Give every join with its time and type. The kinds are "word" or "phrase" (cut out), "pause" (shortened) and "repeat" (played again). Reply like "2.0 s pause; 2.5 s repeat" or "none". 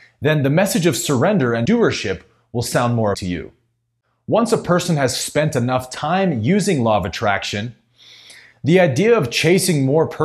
1.6 s word; 3.1 s word

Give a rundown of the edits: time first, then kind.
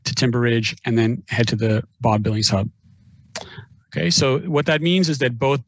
none

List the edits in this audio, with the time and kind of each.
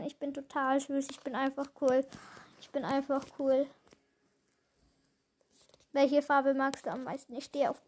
none

